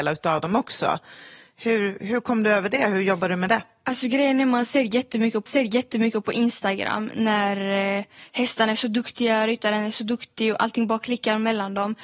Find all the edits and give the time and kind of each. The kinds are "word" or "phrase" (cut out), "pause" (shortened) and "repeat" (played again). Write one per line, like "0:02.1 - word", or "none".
0:05.5 - repeat

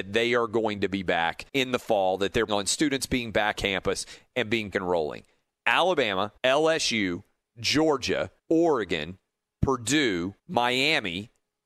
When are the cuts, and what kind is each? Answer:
0:01.5 - pause
0:02.5 - word
0:03.5 - word
0:04.7 - word
0:06.4 - pause
0:08.4 - pause
0:10.4 - pause

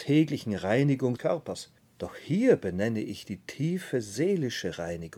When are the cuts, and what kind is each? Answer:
0:01.2 - phrase
0:01.8 - pause

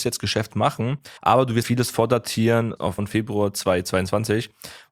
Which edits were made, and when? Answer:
0:01.2 - pause
0:01.6 - word
0:03.0 - word

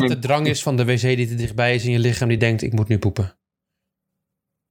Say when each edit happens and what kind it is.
none

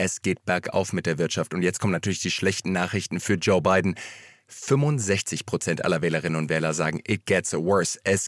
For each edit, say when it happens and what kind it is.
none

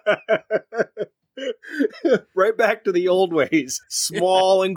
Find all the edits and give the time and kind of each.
0:03.8 - pause

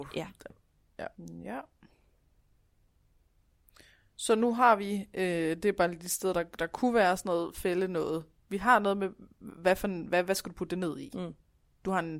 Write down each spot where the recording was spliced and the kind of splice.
0:01.1 - pause

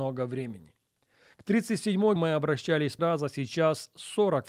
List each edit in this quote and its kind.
0:02.2 - word
0:03.0 - word

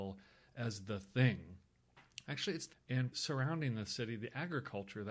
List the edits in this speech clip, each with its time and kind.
0:02.7 - word
0:03.1 - word

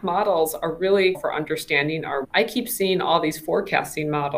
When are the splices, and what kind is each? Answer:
0:01.1 - word
0:02.2 - word

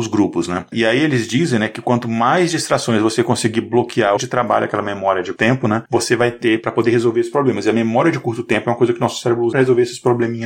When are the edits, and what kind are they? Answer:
0:04.2 - phrase
0:05.3 - word
0:09.5 - word

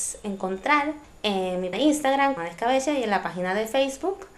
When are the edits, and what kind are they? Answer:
0:01.0 - pause
0:01.7 - word
0:02.4 - word

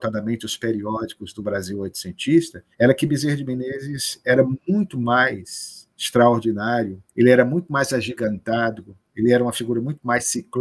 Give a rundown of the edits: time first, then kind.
0:02.7 - pause
0:07.1 - pause
0:09.0 - pause

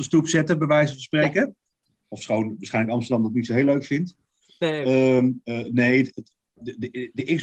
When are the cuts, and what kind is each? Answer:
none

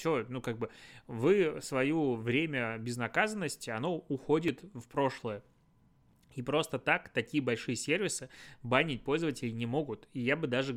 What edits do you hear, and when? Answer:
none

